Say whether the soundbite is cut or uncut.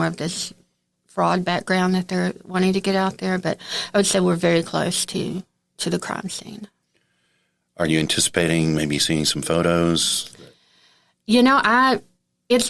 uncut